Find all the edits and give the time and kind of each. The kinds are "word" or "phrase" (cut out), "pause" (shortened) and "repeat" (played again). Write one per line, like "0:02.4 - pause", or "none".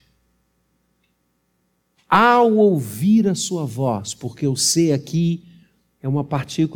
none